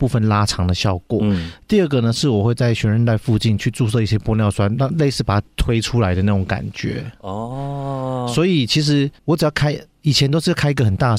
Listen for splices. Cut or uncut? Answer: cut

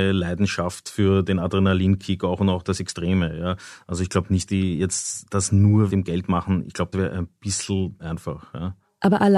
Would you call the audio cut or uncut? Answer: cut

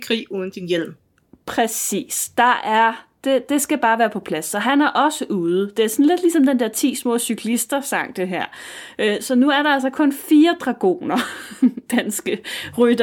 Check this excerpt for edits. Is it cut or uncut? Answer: uncut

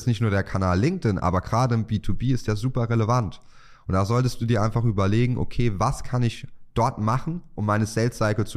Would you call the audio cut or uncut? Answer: uncut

